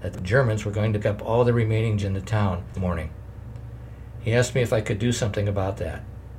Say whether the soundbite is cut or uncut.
cut